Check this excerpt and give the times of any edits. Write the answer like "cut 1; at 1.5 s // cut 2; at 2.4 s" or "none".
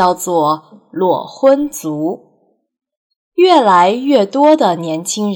none